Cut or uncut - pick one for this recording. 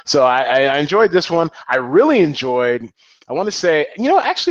uncut